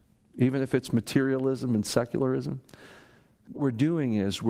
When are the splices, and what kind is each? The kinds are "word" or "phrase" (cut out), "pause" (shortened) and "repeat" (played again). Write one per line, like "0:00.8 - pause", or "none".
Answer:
0:03.5 - word